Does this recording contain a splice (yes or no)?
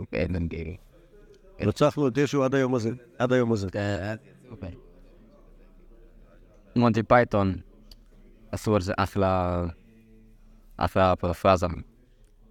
no